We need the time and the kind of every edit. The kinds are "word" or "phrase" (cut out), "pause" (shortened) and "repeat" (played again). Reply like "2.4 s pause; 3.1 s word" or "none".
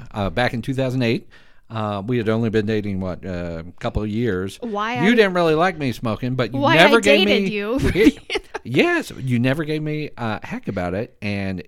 none